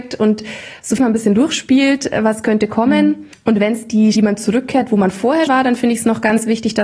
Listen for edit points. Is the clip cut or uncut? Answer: cut